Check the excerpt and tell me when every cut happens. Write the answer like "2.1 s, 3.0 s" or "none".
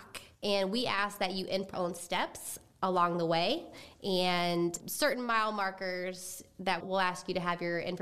1.7 s, 4.8 s, 6.8 s